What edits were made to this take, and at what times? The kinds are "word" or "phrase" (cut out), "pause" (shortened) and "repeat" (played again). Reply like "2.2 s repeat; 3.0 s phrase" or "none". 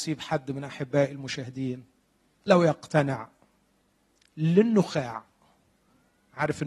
2.5 s word